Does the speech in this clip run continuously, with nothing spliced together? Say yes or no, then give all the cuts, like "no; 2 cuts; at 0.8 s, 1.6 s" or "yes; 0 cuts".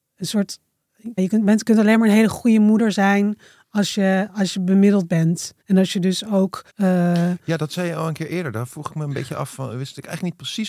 no; 3 cuts; at 1.2 s, 5.6 s, 6.7 s